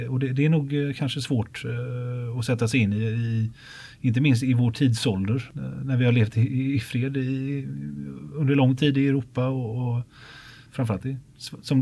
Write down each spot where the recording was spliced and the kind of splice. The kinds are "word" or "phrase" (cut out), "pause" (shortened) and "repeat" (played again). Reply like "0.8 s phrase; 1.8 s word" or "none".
none